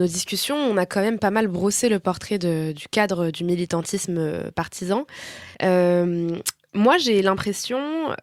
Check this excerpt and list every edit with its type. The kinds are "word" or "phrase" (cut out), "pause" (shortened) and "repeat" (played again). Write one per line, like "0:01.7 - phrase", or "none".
0:05.5 - pause